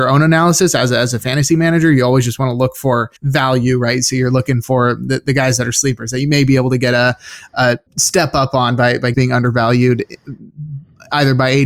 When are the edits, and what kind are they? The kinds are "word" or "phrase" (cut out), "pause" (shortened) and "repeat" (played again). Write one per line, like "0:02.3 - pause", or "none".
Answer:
0:03.2 - pause
0:07.9 - pause
0:09.1 - phrase